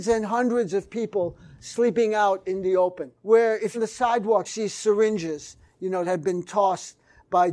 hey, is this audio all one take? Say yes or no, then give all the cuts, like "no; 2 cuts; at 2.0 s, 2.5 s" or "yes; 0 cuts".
no; 4 cuts; at 3.2 s, 3.7 s, 4.4 s, 6.0 s